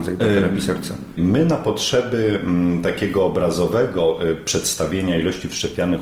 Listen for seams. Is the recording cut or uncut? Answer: uncut